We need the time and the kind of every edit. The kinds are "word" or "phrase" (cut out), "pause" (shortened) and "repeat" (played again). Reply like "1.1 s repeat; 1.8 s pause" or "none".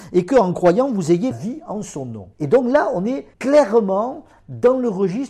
1.3 s word; 2.3 s pause; 3.3 s pause